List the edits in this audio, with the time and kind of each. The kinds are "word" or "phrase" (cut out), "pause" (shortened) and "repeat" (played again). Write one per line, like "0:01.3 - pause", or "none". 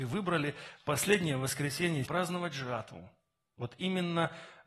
0:02.1 - phrase